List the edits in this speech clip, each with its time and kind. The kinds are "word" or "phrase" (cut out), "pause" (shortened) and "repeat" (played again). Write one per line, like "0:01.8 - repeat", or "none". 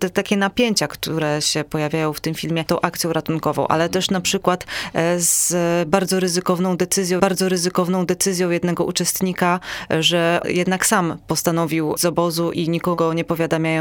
0:02.7 - phrase
0:07.2 - repeat
0:10.4 - word
0:12.0 - word